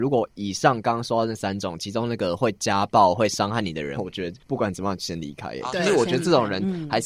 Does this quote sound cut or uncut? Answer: cut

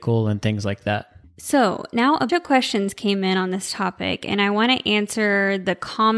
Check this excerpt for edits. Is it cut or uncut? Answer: cut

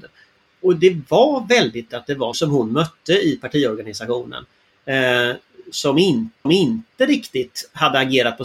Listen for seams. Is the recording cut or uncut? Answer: cut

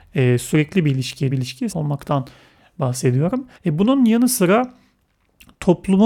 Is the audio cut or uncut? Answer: cut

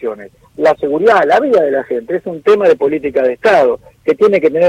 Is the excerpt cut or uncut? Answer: uncut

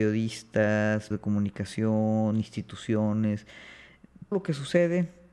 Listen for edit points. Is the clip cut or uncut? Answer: cut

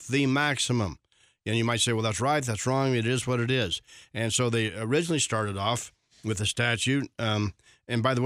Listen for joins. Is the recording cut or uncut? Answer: uncut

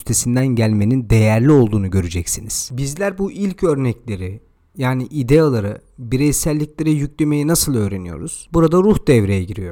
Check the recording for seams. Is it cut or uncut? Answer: uncut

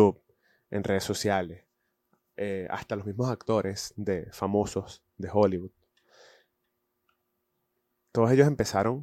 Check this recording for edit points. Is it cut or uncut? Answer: uncut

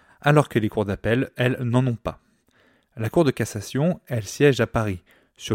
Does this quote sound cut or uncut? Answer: uncut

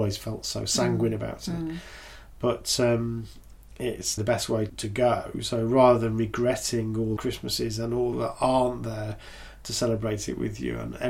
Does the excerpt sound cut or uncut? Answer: cut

